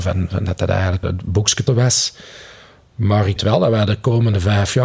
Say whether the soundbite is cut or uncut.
cut